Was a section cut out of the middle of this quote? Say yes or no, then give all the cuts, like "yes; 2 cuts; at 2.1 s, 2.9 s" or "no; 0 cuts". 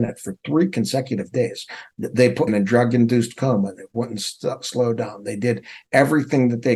yes; 1 cut; at 2.5 s